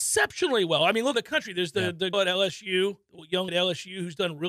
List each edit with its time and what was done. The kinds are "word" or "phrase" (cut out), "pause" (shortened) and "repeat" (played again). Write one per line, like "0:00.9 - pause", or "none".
0:01.1 - word
0:02.1 - word
0:03.5 - word